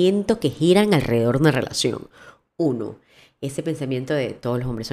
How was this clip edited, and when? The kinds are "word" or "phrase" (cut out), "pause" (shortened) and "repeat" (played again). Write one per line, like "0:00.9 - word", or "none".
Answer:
none